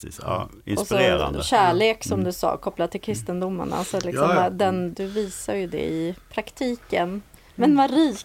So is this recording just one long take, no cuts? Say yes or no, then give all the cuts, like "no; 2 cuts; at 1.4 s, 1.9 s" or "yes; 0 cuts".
no; 1 cut; at 4.9 s